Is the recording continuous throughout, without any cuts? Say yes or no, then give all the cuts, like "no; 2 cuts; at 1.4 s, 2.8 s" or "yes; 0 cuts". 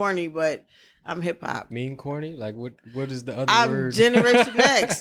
no; 1 cut; at 1.7 s